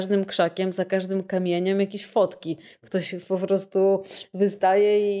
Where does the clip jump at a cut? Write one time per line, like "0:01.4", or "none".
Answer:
none

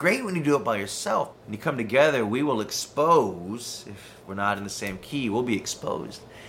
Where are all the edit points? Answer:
0:01.3

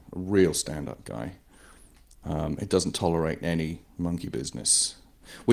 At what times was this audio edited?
none

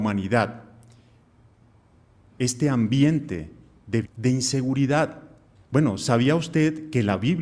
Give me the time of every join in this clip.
0:04.0
0:05.5

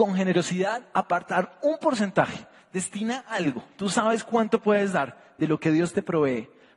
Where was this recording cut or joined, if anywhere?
none

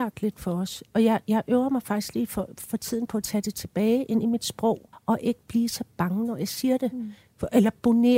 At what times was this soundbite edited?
0:04.9

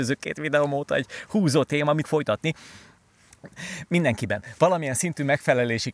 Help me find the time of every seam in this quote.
0:02.0

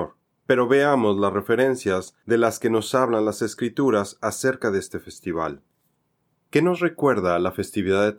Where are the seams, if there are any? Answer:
none

